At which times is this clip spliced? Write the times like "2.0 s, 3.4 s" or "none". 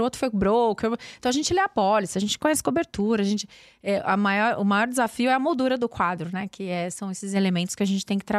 none